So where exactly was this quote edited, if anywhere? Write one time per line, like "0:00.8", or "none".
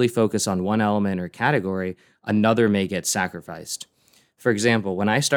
none